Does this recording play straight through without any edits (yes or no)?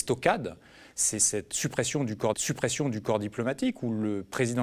no